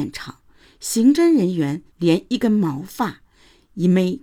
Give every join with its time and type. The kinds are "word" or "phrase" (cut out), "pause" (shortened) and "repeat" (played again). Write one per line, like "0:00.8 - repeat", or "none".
0:01.9 - pause